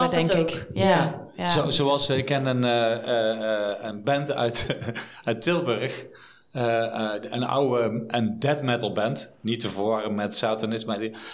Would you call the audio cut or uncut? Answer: uncut